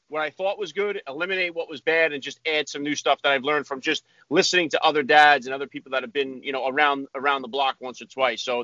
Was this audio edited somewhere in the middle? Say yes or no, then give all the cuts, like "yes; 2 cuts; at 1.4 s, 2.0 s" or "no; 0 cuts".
no; 0 cuts